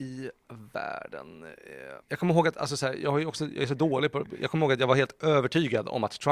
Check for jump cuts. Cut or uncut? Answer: cut